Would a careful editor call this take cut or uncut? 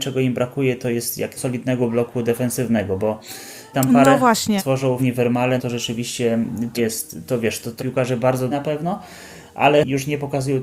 cut